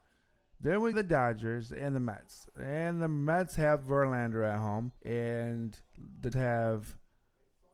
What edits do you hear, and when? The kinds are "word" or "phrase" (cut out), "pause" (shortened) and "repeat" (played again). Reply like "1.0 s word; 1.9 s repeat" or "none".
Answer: 0.9 s word; 5.0 s pause; 6.3 s word